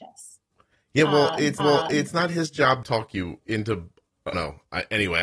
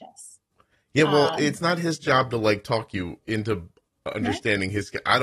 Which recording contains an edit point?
first; 3 cuts; at 1.6 s, 2.8 s, 4.3 s

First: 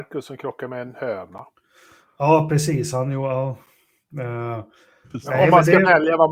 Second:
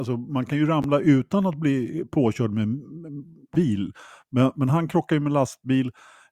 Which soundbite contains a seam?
second; 1 cut; at 3.5 s

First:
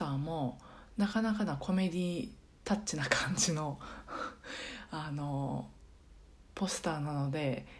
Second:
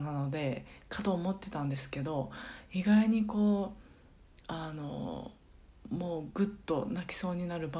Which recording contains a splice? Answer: first; 1 cut; at 6.5 s

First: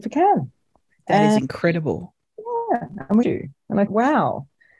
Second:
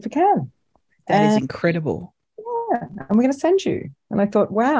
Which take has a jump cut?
first; 2 cuts; at 3.2 s, 3.9 s

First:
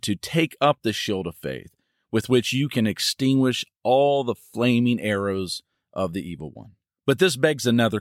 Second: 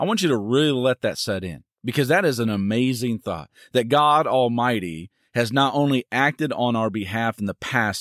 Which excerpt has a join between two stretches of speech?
second; 1 cut; at 1.8 s

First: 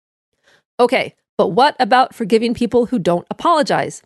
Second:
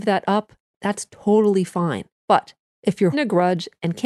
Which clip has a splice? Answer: second; 2 cuts; at 2.1 s, 3.1 s

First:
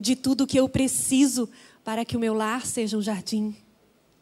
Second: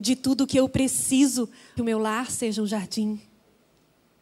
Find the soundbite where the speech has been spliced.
second; 1 cut; at 1.8 s

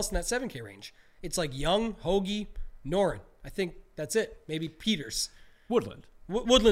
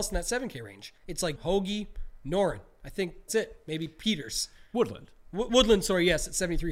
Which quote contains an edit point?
second; 4 cuts; at 1.0 s, 1.4 s, 3.3 s, 4.7 s

